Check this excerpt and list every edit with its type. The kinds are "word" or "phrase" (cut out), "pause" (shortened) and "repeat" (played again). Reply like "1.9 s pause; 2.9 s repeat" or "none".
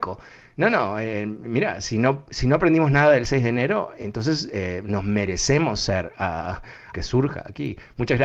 6.9 s phrase